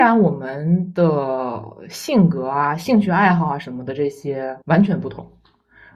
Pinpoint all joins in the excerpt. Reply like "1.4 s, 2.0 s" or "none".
4.6 s